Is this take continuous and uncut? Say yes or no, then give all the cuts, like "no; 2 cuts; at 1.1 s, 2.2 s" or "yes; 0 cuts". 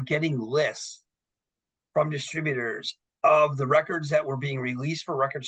yes; 0 cuts